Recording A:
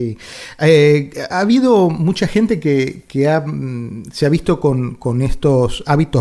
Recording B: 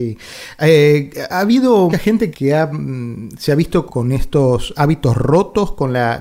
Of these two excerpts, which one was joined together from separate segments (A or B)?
B